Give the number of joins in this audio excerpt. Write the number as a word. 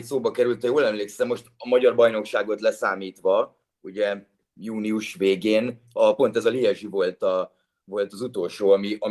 zero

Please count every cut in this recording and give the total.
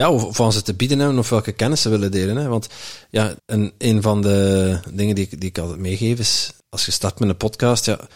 two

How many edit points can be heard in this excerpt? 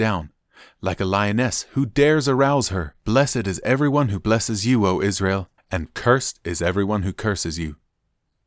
two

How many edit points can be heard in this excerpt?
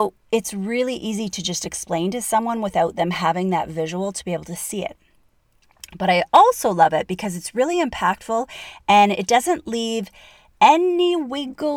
zero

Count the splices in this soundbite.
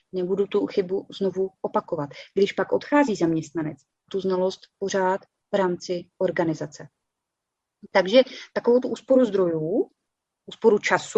one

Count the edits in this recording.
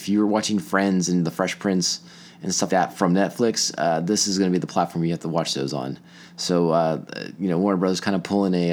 one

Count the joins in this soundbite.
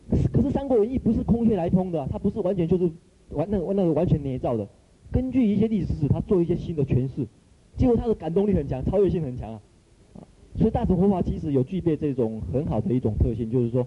two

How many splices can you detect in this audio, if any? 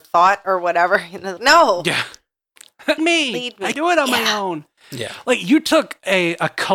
three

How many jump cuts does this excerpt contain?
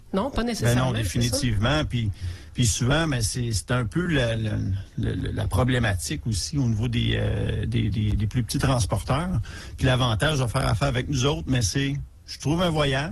zero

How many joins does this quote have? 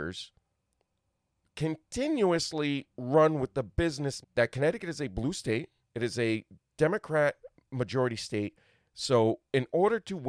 three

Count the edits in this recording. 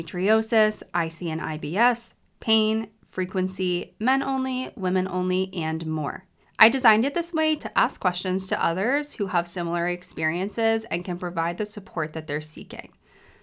two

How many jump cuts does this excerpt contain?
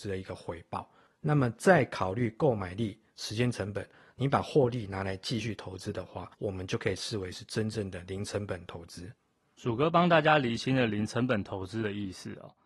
one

